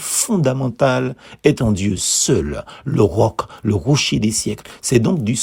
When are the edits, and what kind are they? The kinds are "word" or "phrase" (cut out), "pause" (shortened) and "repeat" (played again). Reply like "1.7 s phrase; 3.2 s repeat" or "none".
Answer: none